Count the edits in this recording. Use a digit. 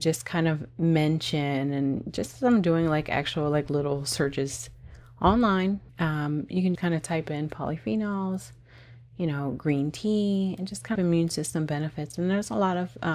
3